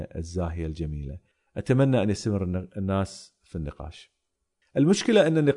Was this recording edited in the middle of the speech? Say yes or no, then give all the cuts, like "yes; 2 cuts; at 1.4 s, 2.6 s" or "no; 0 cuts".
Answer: no; 0 cuts